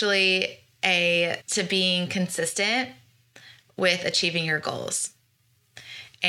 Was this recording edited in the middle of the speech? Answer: yes; 1 cut; at 1.4 s

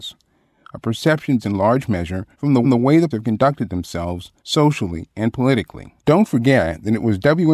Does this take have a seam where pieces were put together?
yes; 6 cuts; at 1.4 s, 2.3 s, 2.6 s, 3.1 s, 4.4 s, 6.0 s

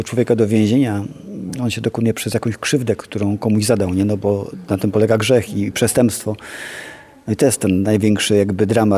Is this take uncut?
yes; 0 cuts

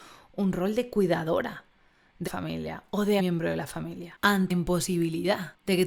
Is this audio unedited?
no; 3 cuts; at 2.3 s, 3.2 s, 4.5 s

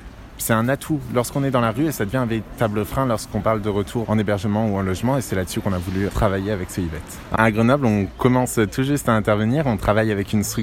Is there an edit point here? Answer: yes; 3 cuts; at 4.0 s, 6.1 s, 7.4 s

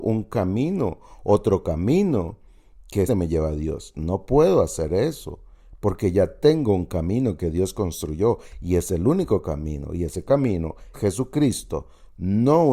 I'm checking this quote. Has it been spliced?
yes; 2 cuts; at 3.1 s, 10.9 s

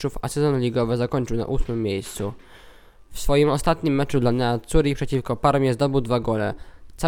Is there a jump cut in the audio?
no; 0 cuts

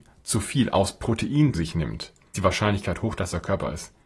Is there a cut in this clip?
yes; 2 cuts; at 1.5 s, 2.3 s

